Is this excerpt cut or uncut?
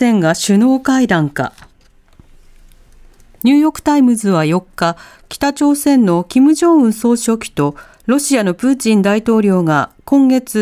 uncut